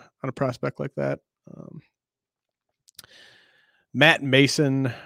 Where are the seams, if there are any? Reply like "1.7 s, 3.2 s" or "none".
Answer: none